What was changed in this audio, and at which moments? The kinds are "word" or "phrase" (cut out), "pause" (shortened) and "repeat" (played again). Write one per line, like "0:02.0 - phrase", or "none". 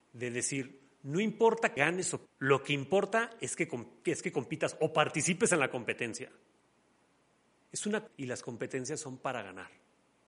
0:01.8 - word
0:02.3 - word
0:08.1 - word